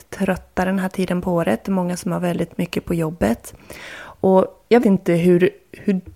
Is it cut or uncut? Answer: cut